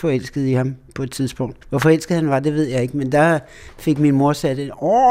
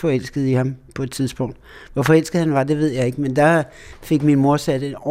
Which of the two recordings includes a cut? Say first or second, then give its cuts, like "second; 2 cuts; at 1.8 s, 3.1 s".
first; 1 cut; at 1.6 s